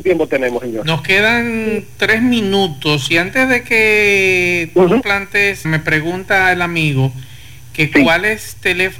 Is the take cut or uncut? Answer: cut